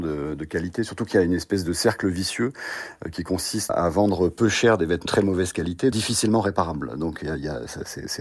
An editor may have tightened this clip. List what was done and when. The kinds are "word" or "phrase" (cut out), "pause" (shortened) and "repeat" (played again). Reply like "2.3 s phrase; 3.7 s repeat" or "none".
3.7 s word; 5.1 s word; 5.9 s word